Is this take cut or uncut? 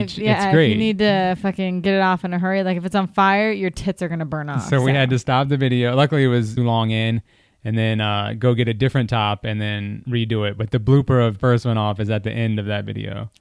cut